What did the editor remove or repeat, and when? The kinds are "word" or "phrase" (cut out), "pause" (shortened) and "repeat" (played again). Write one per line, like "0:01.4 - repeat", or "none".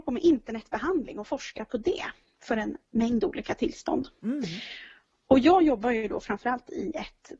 none